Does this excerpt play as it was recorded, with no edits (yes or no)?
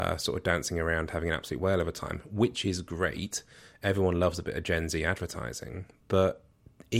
yes